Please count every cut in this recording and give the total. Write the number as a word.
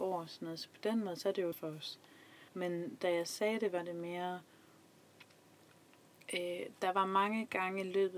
two